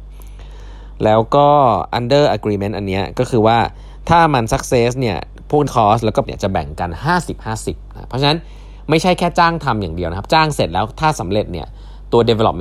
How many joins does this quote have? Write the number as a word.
two